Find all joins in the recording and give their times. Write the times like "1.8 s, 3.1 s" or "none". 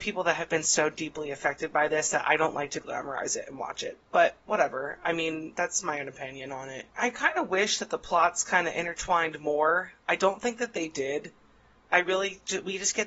none